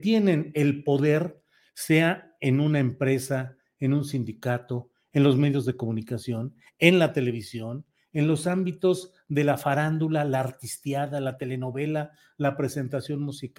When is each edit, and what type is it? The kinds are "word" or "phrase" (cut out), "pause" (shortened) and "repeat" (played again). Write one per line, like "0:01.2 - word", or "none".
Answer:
none